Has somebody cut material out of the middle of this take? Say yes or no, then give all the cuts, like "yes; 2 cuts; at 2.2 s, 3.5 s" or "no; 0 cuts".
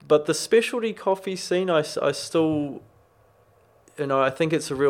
no; 0 cuts